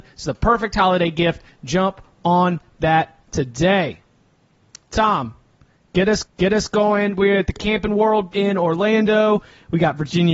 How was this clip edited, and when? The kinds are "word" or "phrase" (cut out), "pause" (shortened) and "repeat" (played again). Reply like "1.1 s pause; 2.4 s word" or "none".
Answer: 6.2 s repeat; 8.3 s word